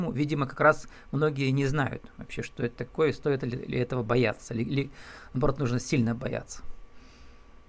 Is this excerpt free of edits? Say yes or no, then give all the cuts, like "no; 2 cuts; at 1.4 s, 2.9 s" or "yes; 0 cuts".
yes; 0 cuts